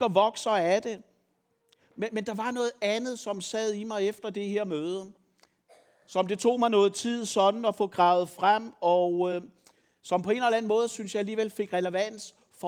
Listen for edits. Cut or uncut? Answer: uncut